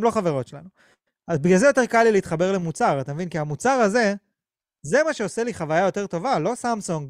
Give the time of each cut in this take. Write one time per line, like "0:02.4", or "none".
none